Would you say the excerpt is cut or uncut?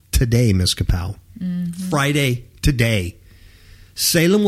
uncut